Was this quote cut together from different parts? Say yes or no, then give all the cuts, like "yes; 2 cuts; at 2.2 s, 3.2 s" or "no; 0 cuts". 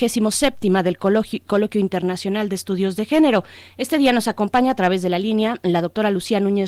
no; 0 cuts